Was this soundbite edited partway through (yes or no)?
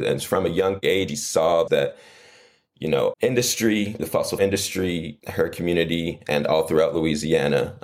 yes